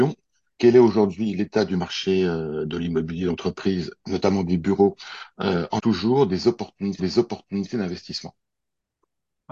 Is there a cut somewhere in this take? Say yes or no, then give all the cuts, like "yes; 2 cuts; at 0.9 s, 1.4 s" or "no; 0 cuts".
yes; 2 cuts; at 5.8 s, 7.0 s